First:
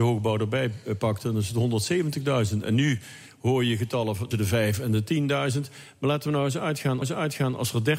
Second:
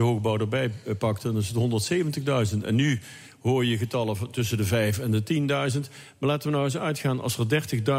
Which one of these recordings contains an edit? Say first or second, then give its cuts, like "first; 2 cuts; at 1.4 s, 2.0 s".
first; 2 cuts; at 4.3 s, 7.0 s